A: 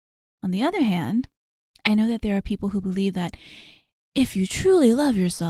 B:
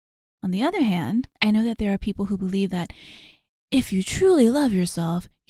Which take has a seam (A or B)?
B